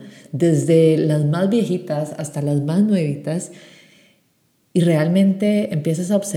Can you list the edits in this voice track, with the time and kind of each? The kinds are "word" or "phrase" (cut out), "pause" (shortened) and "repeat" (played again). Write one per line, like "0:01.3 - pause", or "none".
none